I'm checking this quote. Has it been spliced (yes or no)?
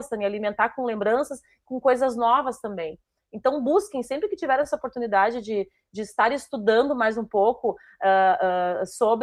no